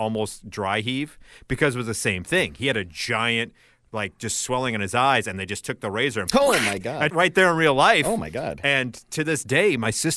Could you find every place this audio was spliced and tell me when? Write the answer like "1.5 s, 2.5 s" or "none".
7.1 s